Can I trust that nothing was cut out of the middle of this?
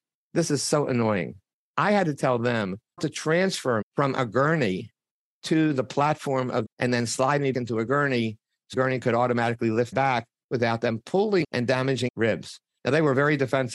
no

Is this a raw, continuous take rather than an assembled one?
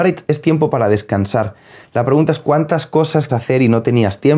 no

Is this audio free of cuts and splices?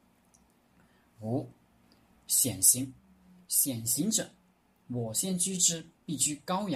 yes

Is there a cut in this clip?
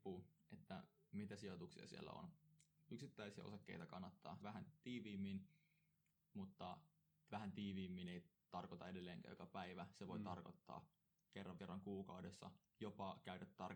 yes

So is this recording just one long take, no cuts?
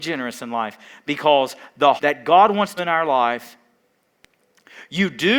no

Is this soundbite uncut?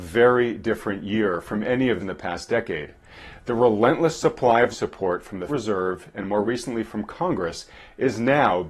no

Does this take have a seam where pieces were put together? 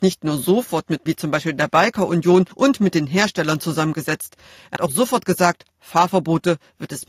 yes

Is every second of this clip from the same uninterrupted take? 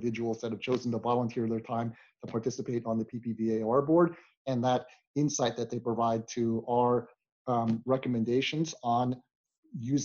yes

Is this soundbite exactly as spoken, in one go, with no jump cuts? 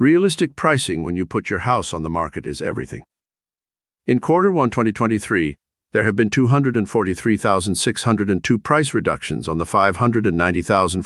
yes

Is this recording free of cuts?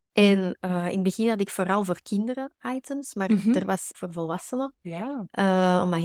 no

